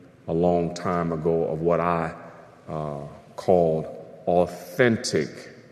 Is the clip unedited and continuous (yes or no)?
yes